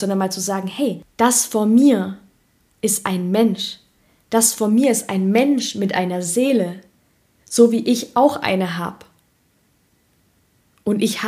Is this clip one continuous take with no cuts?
yes; 0 cuts

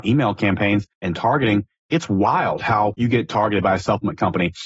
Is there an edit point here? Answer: yes; 2 cuts; at 0.9 s, 2.9 s

